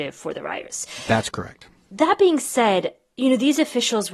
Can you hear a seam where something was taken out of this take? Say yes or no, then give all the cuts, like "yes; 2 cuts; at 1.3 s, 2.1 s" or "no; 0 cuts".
no; 0 cuts